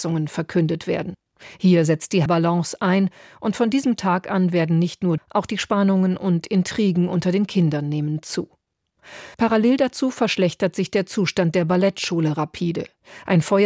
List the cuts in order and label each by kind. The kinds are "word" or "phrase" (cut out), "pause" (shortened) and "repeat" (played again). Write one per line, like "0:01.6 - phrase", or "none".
0:02.3 - phrase
0:05.2 - phrase
0:09.3 - pause